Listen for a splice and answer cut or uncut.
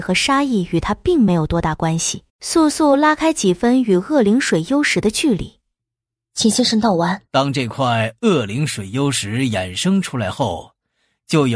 cut